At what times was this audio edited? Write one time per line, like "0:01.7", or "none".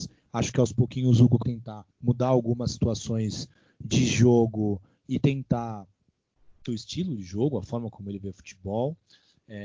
0:01.4
0:01.9
0:06.7